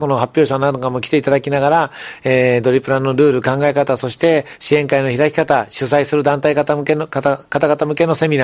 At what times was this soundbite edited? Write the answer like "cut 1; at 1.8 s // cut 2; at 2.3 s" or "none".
none